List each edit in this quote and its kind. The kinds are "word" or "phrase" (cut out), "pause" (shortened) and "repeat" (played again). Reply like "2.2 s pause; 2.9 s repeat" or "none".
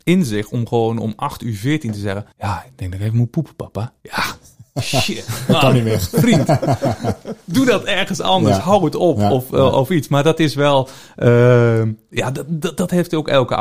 2.3 s pause; 4.0 s pause